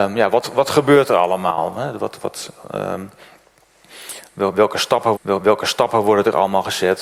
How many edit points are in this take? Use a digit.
1